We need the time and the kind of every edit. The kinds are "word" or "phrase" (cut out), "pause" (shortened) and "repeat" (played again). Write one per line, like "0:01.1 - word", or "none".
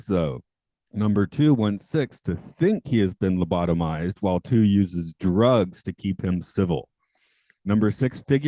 none